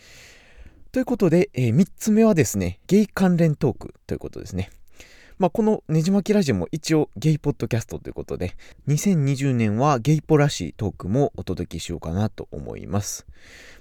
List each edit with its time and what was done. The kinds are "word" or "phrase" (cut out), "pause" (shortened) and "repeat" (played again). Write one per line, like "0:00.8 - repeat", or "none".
0:02.8 - pause
0:04.0 - pause